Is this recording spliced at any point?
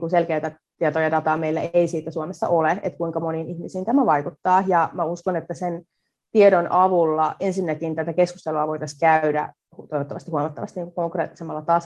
no; 0 cuts

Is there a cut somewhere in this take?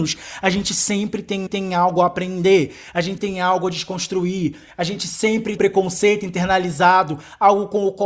yes; 3 cuts; at 1.5 s, 3.2 s, 5.6 s

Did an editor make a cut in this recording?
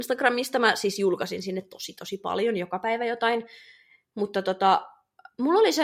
no; 0 cuts

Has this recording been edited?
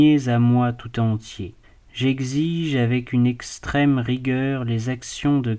yes; 1 cut; at 1.6 s

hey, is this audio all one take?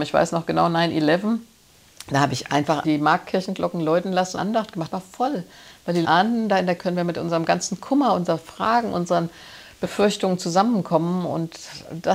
no; 5 cuts; at 2.8 s, 4.4 s, 4.9 s, 6.0 s, 6.8 s

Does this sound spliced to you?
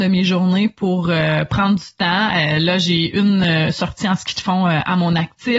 no; 0 cuts

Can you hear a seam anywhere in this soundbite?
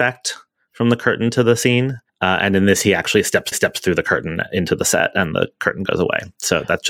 yes; 2 cuts; at 2.1 s, 3.5 s

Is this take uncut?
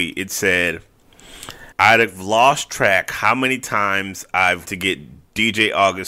no; 2 cuts; at 1.7 s, 4.6 s

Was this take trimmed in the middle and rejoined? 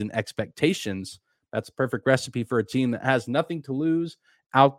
no; 0 cuts

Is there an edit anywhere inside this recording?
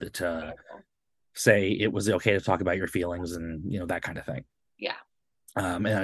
no; 0 cuts

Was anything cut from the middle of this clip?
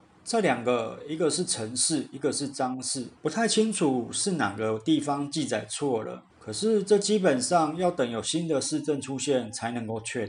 yes; 2 cuts; at 3.2 s, 6.3 s

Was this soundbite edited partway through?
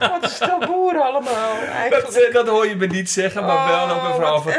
no; 0 cuts

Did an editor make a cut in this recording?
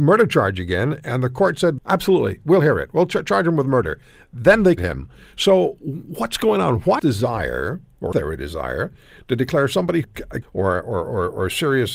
yes; 6 cuts; at 1.8 s, 4.8 s, 7.0 s, 8.1 s, 10.0 s, 10.4 s

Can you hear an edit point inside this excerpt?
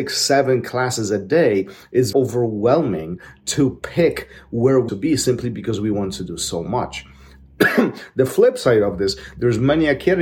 yes; 2 cuts; at 2.1 s, 4.9 s

